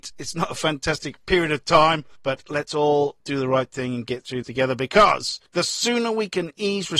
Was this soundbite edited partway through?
yes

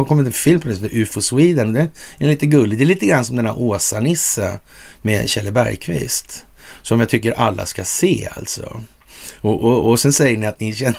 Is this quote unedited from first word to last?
yes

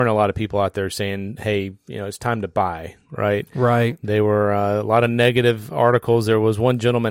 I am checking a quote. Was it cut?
no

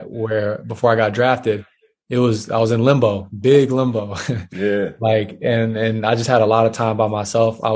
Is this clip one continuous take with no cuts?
yes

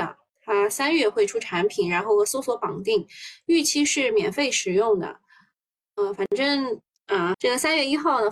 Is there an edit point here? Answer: yes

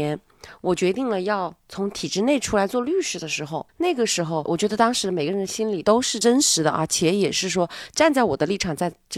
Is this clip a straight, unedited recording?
no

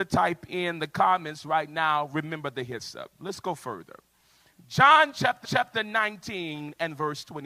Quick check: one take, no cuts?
no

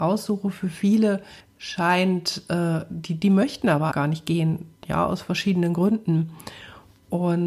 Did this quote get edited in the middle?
yes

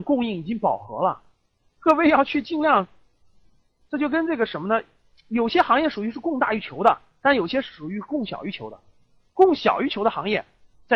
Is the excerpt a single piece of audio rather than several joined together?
yes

